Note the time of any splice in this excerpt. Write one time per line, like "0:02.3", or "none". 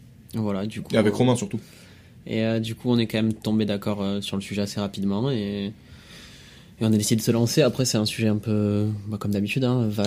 none